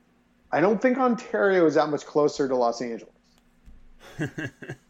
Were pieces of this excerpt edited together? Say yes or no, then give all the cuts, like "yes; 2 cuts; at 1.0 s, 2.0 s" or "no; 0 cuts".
no; 0 cuts